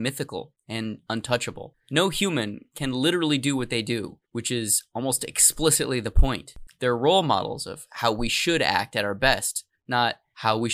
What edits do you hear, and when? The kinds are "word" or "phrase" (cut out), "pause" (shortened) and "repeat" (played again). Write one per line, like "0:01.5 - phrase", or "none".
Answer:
0:04.3 - pause